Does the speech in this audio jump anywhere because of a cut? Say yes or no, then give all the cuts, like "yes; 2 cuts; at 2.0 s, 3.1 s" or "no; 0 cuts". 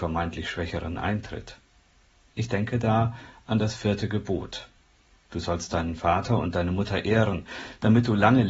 no; 0 cuts